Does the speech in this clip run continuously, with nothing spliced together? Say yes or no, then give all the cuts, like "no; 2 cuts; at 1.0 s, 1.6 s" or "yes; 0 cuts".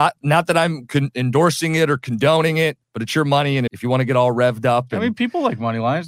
no; 2 cuts; at 2.8 s, 3.7 s